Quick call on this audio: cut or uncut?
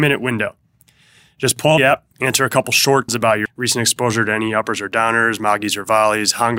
cut